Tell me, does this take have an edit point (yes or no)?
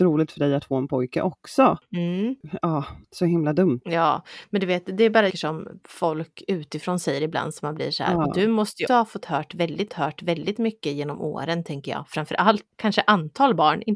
yes